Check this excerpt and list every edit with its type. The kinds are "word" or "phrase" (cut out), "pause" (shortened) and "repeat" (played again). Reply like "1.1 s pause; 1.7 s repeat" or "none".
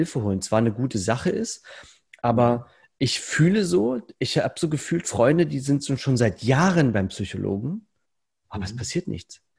none